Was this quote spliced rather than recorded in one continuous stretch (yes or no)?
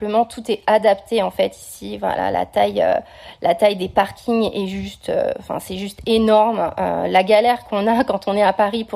no